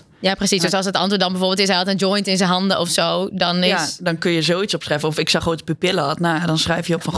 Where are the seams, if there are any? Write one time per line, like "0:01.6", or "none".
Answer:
0:05.4